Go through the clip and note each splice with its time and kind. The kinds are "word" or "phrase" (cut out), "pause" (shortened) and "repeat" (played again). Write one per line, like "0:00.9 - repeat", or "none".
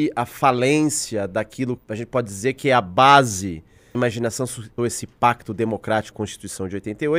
0:01.8 - word
0:03.9 - word
0:04.8 - word
0:06.1 - word